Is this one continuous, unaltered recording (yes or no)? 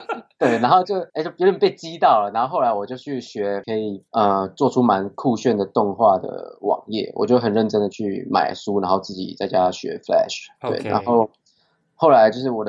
no